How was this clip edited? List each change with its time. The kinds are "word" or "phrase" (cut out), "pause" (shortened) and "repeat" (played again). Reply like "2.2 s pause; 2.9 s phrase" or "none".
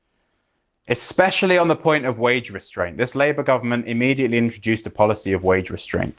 none